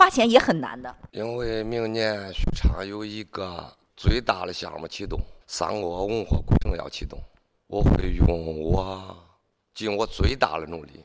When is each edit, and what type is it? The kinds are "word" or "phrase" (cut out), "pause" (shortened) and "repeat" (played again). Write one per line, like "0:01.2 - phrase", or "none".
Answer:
0:01.1 - pause
0:05.4 - pause